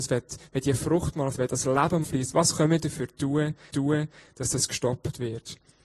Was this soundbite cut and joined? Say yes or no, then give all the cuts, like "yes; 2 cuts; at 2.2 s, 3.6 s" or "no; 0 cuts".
yes; 3 cuts; at 1.3 s, 2.0 s, 3.7 s